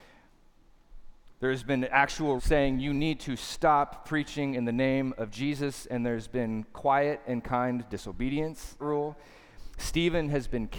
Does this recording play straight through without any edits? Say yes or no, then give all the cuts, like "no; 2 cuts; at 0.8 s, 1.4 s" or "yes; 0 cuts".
no; 2 cuts; at 2.4 s, 8.8 s